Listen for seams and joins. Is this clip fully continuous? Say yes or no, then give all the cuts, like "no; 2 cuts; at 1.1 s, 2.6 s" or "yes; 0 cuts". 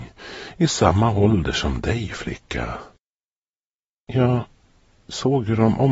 yes; 0 cuts